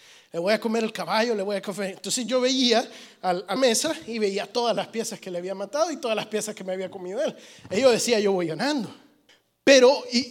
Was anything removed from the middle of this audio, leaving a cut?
yes; 2 cuts; at 3.6 s, 9.3 s

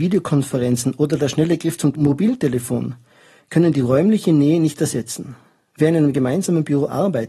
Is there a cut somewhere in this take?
no; 0 cuts

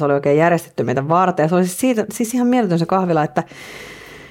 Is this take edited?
no; 0 cuts

